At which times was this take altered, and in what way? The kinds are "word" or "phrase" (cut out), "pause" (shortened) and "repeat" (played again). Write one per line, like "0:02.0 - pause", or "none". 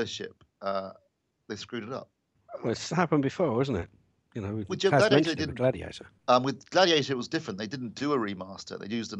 0:04.7 - word